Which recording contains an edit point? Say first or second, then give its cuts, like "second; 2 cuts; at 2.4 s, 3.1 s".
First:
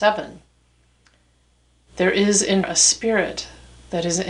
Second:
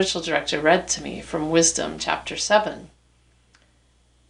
first; 1 cut; at 2.6 s